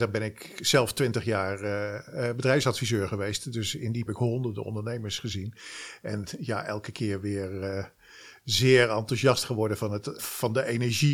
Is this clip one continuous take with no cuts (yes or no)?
no